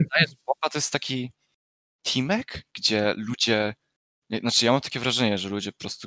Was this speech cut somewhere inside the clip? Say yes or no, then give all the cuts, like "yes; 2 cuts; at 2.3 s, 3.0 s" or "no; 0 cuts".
no; 0 cuts